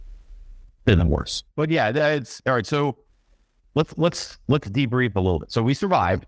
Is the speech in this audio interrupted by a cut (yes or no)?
no